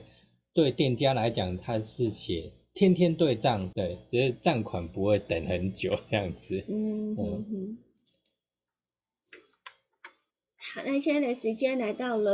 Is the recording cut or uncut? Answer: cut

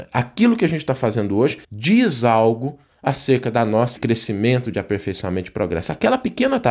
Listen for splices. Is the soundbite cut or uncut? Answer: cut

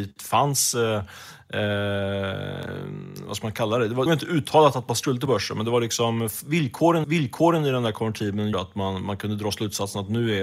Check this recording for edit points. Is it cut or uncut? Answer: cut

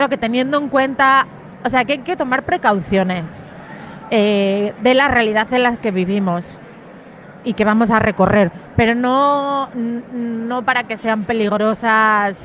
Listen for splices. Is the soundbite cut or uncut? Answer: uncut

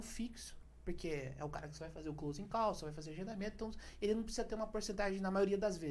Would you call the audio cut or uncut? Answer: uncut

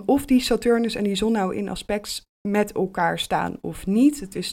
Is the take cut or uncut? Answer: uncut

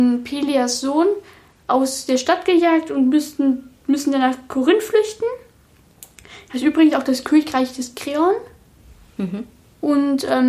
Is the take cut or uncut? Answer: uncut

